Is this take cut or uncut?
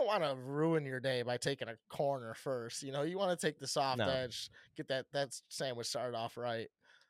uncut